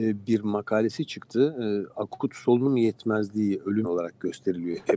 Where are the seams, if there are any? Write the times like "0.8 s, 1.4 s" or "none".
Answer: 3.8 s